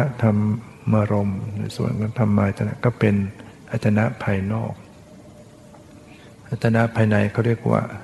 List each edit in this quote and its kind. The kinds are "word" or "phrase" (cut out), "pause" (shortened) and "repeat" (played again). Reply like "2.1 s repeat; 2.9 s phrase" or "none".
none